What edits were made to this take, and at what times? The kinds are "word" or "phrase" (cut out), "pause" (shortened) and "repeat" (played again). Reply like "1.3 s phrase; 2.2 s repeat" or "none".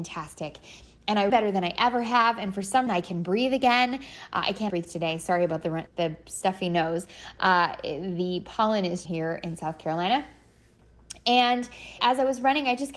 1.3 s word; 2.9 s word; 4.7 s word; 5.9 s word; 9.0 s word; 12.0 s word